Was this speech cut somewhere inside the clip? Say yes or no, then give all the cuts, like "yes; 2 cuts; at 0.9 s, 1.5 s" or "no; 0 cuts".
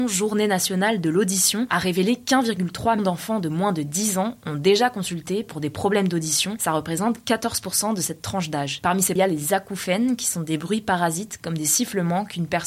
yes; 2 cuts; at 3.0 s, 9.2 s